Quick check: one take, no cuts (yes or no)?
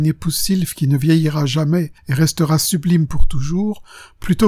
no